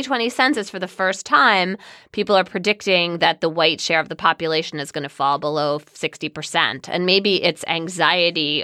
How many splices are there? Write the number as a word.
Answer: zero